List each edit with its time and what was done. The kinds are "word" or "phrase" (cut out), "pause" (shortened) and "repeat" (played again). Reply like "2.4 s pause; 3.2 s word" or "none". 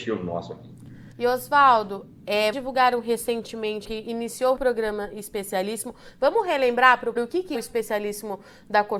1.1 s pause; 2.5 s word; 3.8 s word; 4.6 s phrase; 7.2 s word; 7.5 s word

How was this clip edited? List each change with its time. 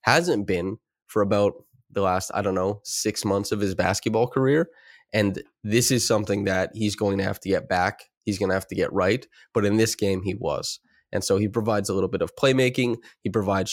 none

